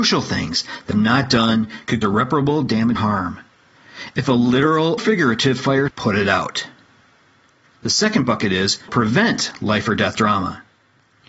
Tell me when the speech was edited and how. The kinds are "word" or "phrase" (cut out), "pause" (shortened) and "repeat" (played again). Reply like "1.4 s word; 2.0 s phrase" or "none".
0.9 s word; 2.0 s word; 3.0 s word; 5.0 s word; 5.9 s word; 8.9 s word